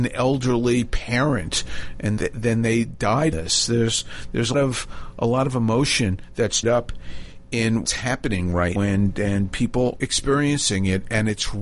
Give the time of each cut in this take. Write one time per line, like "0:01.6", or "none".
0:02.2
0:03.3
0:04.5
0:06.6
0:07.8
0:08.8
0:10.0